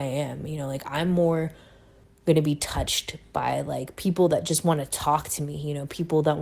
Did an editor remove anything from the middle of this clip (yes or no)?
no